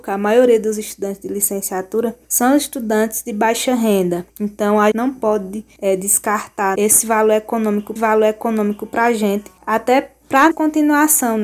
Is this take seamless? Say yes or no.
no